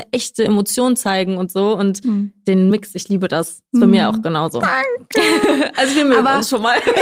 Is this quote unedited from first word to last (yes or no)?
yes